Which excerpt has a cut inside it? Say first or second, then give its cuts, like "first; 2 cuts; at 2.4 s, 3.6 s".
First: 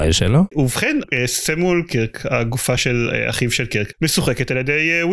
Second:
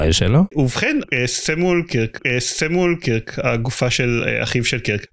second; 1 cut; at 2.2 s